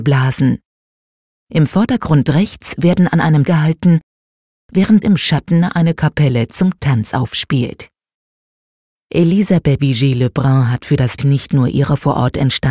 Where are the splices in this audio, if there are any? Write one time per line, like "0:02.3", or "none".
0:03.5
0:05.0
0:05.9
0:09.8
0:11.2